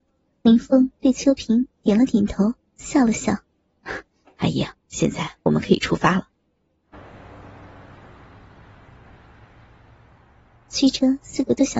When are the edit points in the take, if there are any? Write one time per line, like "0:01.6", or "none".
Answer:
0:03.4
0:04.8
0:06.9